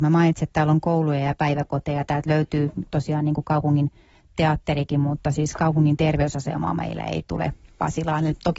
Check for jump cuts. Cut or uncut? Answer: uncut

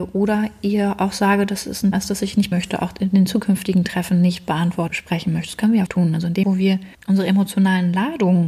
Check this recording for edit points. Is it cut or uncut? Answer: cut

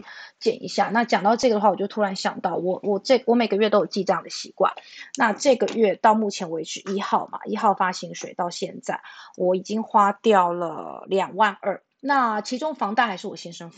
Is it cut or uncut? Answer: cut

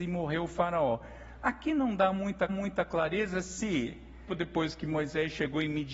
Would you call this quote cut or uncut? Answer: cut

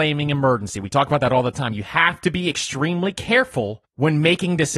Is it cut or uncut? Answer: uncut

